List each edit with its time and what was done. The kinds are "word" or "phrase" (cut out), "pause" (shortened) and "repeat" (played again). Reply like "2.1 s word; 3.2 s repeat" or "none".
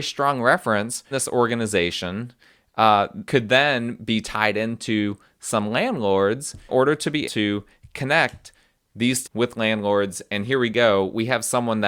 1.1 s word; 3.3 s word; 6.7 s word; 7.2 s word; 9.2 s word